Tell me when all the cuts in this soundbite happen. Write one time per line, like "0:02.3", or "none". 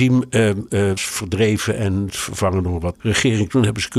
0:01.0
0:02.1
0:02.9

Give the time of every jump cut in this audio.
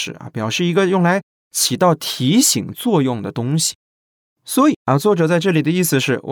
none

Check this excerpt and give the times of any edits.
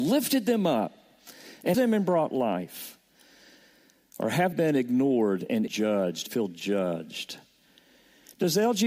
0:01.7
0:04.5
0:05.7
0:06.3

